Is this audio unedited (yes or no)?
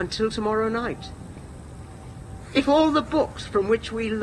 yes